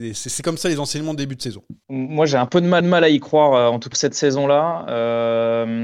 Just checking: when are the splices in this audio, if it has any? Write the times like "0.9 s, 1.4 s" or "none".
1.8 s, 2.8 s, 3.9 s